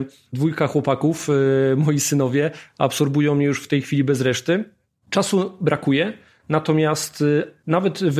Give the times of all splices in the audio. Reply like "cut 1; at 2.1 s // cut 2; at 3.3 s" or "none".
none

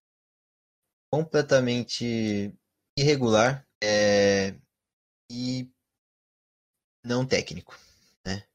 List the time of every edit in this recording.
cut 1; at 3.7 s // cut 2; at 7.3 s

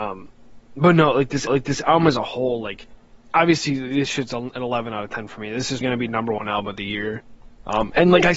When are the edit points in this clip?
cut 1; at 1.5 s // cut 2; at 3.0 s // cut 3; at 5.8 s

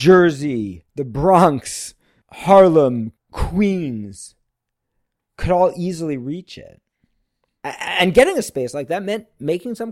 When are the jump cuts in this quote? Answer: none

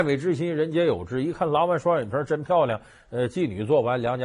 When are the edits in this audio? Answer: none

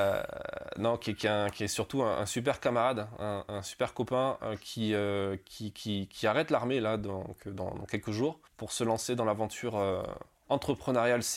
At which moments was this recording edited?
cut 1; at 8.5 s

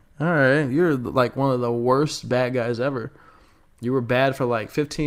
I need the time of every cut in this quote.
none

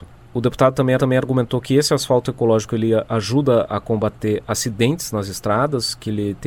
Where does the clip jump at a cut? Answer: cut 1; at 1.0 s

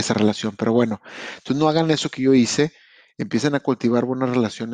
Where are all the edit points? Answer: none

